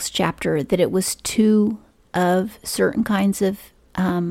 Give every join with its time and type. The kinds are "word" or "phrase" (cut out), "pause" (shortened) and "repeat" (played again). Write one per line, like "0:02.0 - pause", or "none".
none